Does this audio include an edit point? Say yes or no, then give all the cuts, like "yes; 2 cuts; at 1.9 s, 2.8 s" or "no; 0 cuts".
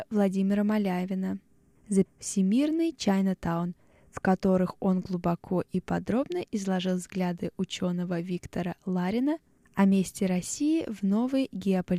yes; 1 cut; at 2.1 s